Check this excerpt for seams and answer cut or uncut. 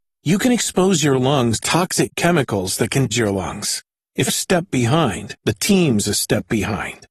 cut